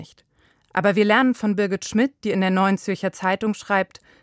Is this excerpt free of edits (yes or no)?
yes